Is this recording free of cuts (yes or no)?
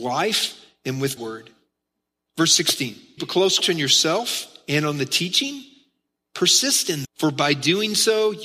no